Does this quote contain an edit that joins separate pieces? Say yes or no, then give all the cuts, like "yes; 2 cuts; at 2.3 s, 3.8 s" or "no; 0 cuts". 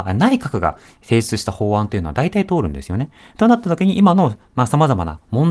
no; 0 cuts